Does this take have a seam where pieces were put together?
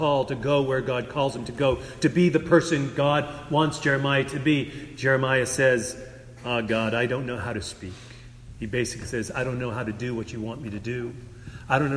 no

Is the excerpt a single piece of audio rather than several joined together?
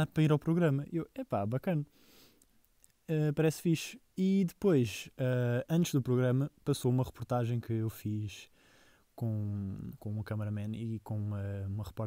yes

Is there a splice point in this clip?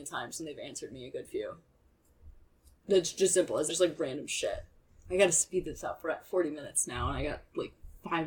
yes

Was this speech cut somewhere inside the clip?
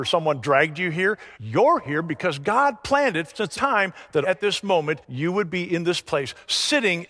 yes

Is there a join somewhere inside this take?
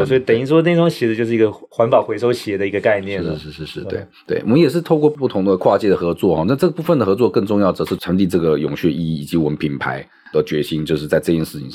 yes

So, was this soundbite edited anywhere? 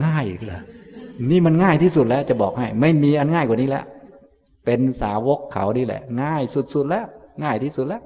no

